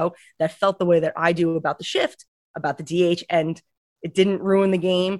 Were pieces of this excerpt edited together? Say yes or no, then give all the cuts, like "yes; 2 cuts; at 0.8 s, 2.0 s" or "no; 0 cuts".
no; 0 cuts